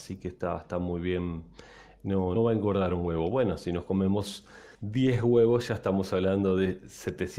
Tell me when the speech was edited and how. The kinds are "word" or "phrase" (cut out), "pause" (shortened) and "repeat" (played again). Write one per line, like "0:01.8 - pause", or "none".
0:02.4 - word
0:04.7 - pause